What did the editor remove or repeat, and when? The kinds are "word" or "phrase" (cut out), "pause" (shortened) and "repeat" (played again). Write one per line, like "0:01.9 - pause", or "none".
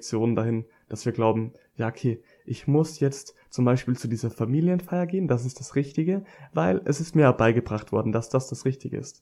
none